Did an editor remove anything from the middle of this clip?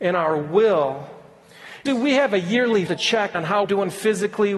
yes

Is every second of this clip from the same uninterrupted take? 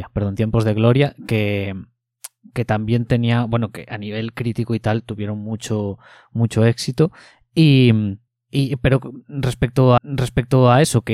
no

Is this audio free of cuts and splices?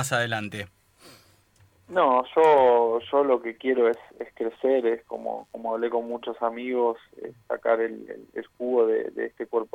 yes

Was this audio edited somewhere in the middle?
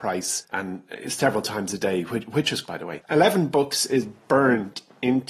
yes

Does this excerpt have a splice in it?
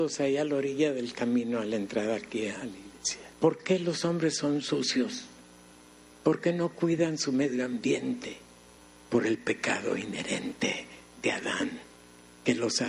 yes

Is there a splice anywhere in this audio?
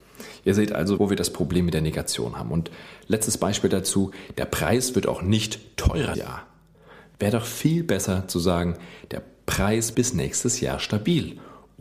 yes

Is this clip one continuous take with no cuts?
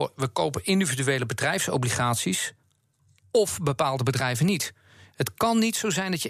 yes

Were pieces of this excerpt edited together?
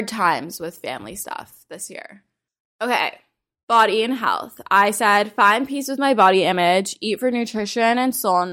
no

